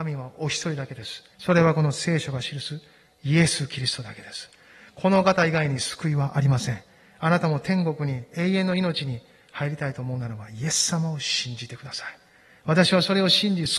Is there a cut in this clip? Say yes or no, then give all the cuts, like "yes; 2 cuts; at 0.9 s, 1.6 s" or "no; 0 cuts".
yes; 1 cut; at 1.3 s